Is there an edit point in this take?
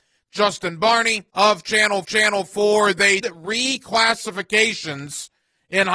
yes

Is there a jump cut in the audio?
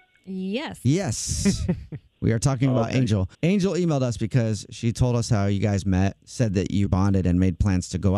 yes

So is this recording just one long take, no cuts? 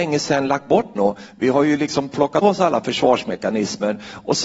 no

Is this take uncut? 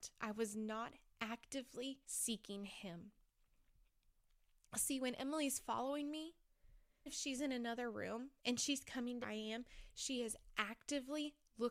no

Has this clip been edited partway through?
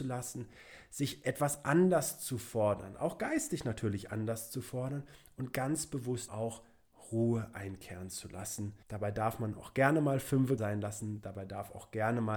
yes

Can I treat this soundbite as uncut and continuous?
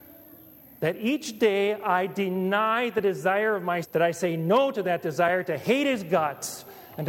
no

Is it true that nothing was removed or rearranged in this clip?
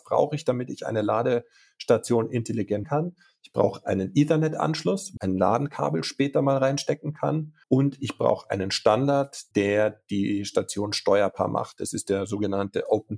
no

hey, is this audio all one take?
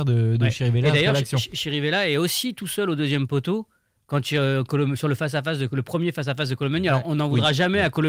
yes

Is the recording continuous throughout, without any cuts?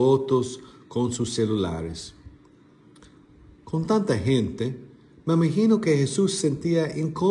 yes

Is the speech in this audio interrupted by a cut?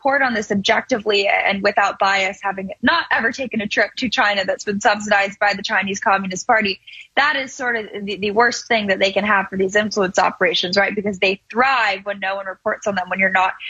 no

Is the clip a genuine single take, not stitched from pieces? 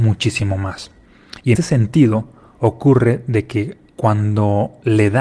no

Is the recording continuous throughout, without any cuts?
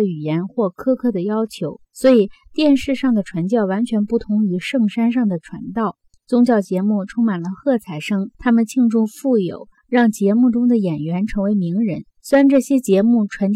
no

